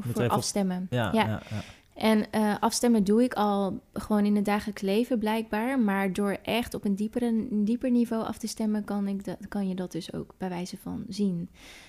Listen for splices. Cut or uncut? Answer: uncut